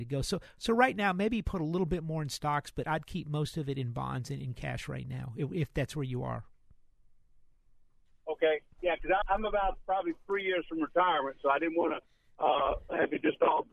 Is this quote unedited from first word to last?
no; 1 cut; at 9.2 s

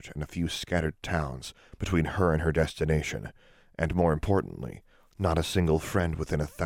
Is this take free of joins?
yes; 0 cuts

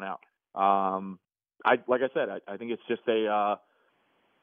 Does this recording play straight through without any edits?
yes; 0 cuts

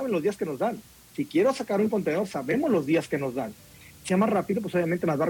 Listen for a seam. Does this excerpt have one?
yes; 1 cut; at 4.1 s

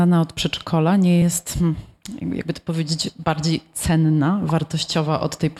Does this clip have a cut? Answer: no; 0 cuts

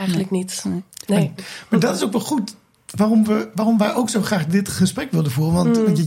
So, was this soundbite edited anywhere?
no; 0 cuts

